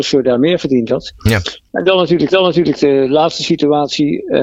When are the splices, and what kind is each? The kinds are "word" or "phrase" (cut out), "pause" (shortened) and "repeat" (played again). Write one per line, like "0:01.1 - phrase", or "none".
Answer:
0:02.3 - repeat

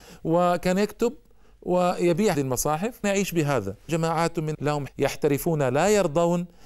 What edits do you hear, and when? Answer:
0:02.3 - word
0:03.0 - word
0:03.9 - word
0:04.5 - word
0:04.9 - word

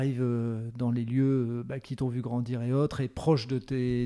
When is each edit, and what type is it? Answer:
none

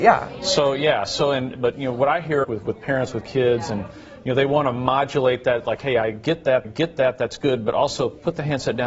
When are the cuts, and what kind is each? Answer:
0:02.4 - word
0:06.6 - repeat

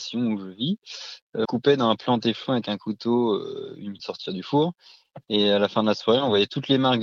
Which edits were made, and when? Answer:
0:01.5 - phrase
0:04.0 - phrase

